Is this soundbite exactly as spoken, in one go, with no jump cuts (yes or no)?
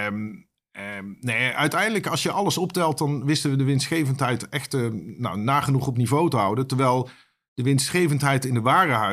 yes